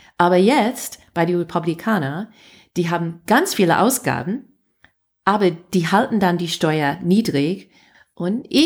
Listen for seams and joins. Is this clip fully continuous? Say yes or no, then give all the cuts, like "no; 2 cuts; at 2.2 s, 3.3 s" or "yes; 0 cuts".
yes; 0 cuts